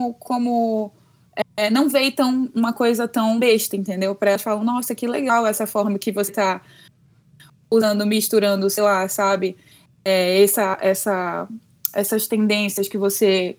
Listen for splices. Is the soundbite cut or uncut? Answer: uncut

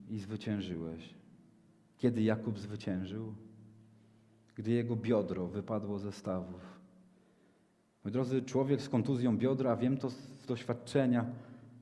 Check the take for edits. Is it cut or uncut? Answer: uncut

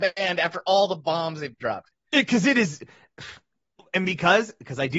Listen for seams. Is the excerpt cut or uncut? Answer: uncut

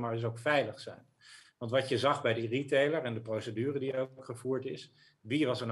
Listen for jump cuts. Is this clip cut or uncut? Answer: uncut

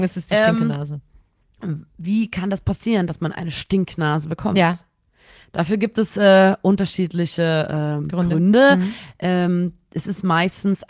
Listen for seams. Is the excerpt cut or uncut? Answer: uncut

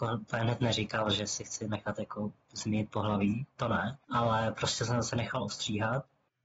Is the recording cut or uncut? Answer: cut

